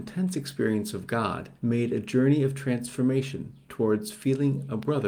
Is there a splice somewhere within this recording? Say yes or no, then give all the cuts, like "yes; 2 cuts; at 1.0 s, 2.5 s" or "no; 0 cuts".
yes; 1 cut; at 1.6 s